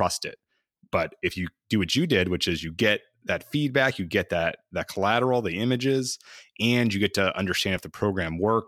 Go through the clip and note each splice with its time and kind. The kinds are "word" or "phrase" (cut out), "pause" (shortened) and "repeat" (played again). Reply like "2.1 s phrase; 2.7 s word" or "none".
none